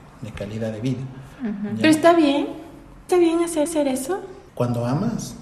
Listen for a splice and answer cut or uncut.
cut